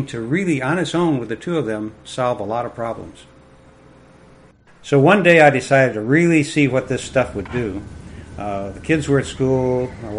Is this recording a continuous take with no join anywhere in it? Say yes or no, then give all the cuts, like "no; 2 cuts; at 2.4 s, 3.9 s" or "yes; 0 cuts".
yes; 0 cuts